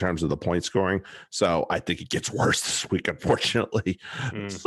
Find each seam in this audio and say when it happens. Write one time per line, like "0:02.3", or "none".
none